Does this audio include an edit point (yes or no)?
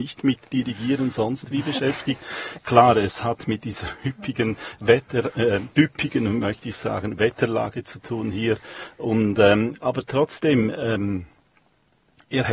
no